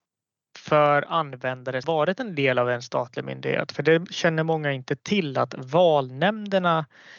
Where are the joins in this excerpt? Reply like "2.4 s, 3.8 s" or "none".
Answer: 1.8 s